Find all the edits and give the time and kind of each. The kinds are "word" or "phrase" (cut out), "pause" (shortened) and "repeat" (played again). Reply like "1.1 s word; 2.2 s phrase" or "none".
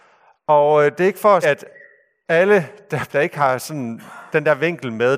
1.4 s word; 3.1 s word